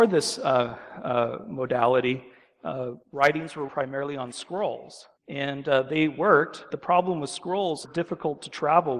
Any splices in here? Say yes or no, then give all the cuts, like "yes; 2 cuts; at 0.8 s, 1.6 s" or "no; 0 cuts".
yes; 5 cuts; at 3.0 s, 3.7 s, 5.2 s, 6.7 s, 7.8 s